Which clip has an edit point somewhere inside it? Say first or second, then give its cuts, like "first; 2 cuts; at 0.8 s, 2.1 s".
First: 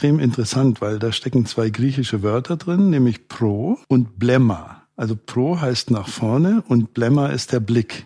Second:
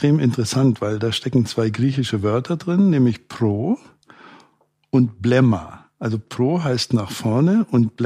first; 1 cut; at 3.8 s